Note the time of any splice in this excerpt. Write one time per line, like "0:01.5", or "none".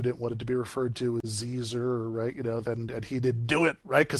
none